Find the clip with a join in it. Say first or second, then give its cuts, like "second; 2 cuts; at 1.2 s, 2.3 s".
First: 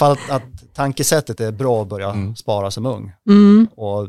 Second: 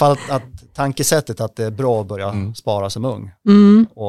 first; 1 cut; at 1.4 s